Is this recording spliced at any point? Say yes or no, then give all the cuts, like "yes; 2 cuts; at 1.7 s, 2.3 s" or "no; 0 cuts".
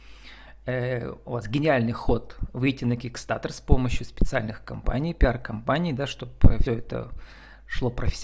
yes; 1 cut; at 6.7 s